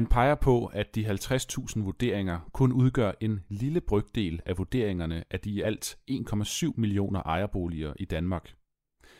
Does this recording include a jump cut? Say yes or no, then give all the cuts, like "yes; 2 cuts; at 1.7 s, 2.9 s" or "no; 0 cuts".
no; 0 cuts